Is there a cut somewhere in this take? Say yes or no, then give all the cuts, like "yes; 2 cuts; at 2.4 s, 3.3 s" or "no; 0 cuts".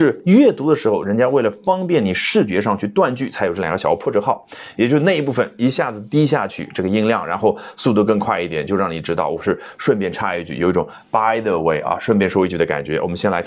no; 0 cuts